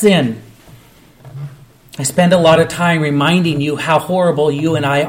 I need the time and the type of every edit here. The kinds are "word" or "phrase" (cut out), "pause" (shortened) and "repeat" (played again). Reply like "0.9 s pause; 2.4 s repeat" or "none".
none